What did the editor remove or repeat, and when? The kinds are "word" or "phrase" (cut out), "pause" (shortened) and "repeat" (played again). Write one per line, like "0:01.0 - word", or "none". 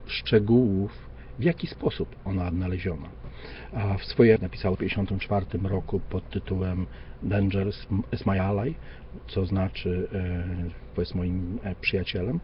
0:02.3 - word
0:04.4 - word
0:04.7 - word
0:10.9 - word